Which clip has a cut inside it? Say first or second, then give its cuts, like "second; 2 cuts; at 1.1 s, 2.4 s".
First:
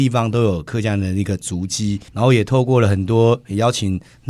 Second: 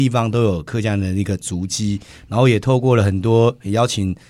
first; 1 cut; at 2.1 s